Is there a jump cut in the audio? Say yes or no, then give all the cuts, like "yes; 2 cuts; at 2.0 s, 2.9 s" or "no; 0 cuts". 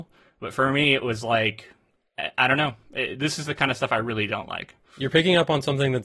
no; 0 cuts